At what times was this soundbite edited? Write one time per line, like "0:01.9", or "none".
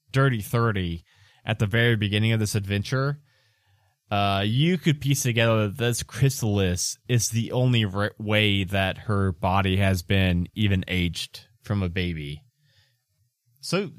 none